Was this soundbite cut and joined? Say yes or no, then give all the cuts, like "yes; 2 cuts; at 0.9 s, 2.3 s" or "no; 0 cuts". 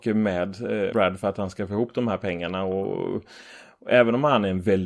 yes; 1 cut; at 0.9 s